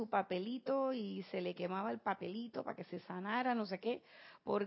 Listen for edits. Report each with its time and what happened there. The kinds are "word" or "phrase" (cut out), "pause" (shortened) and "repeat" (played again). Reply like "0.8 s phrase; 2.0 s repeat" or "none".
none